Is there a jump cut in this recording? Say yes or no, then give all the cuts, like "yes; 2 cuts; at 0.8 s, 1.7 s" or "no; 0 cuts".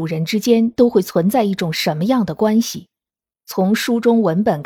no; 0 cuts